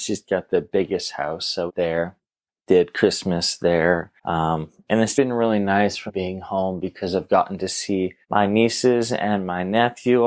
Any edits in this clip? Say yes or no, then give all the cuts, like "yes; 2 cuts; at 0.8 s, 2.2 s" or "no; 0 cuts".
yes; 6 cuts; at 1.7 s, 2.5 s, 4.2 s, 5.1 s, 6.1 s, 8.2 s